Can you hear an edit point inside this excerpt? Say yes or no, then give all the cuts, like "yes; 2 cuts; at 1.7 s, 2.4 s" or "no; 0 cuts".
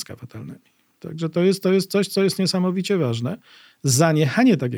no; 0 cuts